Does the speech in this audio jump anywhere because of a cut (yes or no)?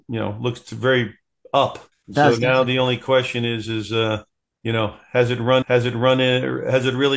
yes